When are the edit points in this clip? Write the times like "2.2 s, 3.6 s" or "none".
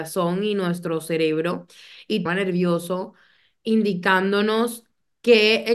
2.3 s